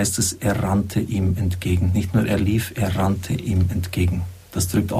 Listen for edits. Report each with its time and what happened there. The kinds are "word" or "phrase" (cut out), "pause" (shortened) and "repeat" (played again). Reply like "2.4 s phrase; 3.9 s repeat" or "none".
none